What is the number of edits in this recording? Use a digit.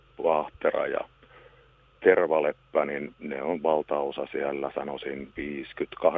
0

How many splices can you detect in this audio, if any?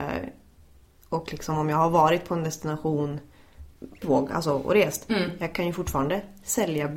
1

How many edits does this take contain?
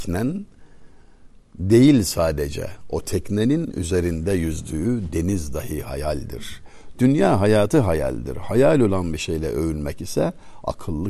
0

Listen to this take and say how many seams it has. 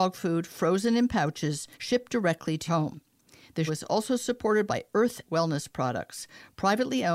4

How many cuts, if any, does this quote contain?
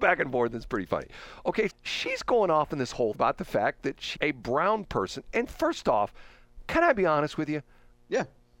3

